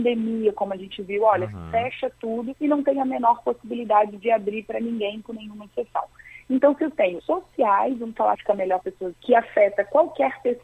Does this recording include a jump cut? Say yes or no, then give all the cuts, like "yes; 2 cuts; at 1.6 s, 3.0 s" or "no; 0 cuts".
yes; 5 cuts; at 2.6 s, 7.2 s, 8.3 s, 8.8 s, 9.1 s